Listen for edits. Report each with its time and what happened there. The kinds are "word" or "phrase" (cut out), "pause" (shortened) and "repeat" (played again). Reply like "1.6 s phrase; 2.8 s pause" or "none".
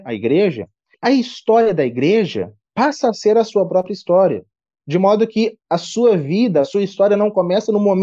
0.9 s word; 2.6 s pause; 5.6 s pause